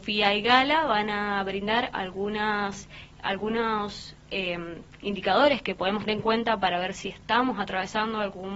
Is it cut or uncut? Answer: cut